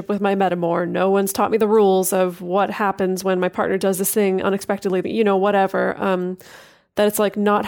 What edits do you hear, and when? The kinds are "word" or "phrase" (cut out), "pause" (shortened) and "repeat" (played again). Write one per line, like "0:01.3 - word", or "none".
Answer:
0:05.0 - phrase